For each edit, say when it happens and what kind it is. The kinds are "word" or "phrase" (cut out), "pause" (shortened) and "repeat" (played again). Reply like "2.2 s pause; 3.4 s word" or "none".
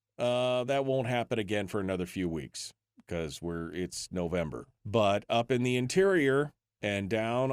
4.7 s pause